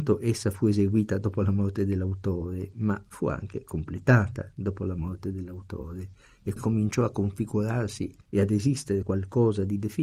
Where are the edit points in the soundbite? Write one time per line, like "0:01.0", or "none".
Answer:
0:06.6
0:08.2
0:09.0